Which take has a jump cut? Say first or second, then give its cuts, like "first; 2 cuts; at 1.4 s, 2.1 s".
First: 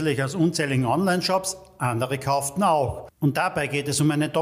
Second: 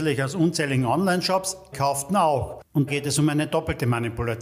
second; 2 cuts; at 1.7 s, 2.9 s